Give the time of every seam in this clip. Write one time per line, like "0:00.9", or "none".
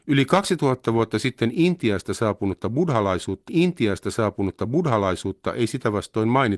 0:03.5